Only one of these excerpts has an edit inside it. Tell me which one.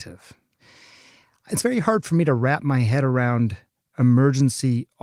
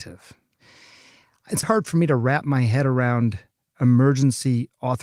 second; 1 cut; at 1.6 s

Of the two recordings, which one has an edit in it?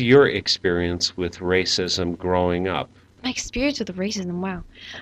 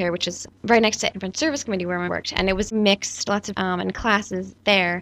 second; 4 cuts; at 1.1 s, 2.1 s, 2.7 s, 3.5 s

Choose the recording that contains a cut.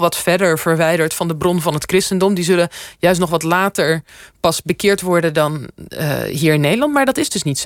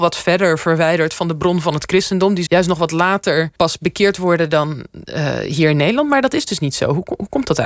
second; 2 cuts; at 2.5 s, 3.6 s

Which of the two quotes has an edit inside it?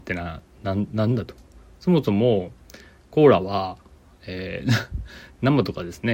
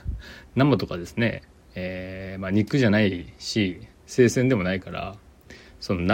second; 2 cuts; at 1.5 s, 3.9 s

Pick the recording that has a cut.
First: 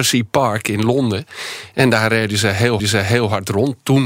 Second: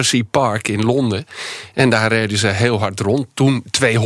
first; 1 cut; at 2.8 s

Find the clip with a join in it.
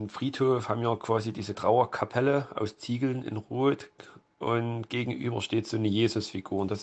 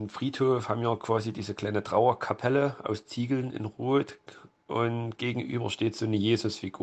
first; 1 cut; at 1.5 s

